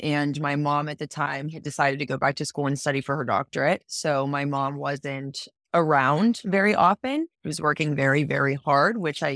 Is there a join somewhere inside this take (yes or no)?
yes